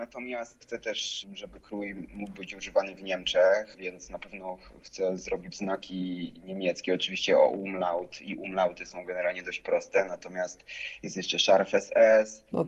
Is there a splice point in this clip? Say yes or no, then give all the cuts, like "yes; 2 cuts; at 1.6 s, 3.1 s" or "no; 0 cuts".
no; 0 cuts